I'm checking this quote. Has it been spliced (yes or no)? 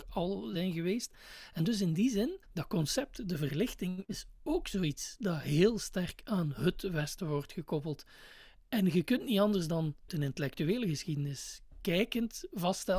yes